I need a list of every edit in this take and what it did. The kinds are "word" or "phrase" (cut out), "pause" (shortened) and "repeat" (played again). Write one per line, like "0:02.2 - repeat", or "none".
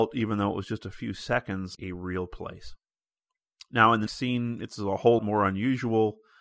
0:01.8 - word
0:04.1 - word
0:05.2 - word